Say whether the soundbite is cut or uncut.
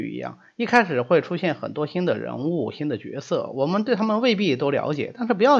uncut